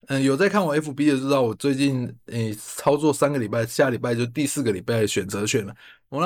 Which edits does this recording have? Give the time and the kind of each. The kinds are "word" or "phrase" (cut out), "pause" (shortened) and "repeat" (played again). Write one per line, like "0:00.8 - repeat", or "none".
none